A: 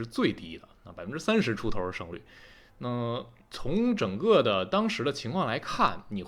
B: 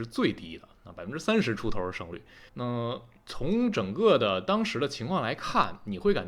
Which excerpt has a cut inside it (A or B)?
B